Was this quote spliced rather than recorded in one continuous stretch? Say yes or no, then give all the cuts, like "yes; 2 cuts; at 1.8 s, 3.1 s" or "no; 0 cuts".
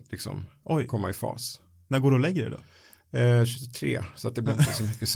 no; 0 cuts